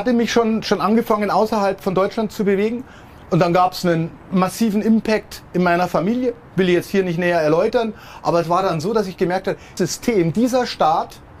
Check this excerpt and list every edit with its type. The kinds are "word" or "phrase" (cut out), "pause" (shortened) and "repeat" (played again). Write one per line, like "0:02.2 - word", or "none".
0:09.8 - word